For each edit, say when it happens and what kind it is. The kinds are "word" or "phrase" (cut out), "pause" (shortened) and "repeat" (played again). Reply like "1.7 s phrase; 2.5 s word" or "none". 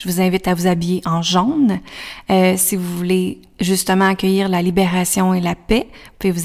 none